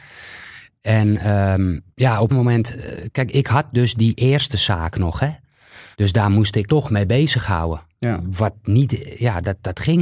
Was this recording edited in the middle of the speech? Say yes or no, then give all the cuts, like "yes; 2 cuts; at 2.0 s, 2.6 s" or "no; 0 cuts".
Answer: yes; 5 cuts; at 1.9 s, 2.3 s, 3.3 s, 5.9 s, 6.7 s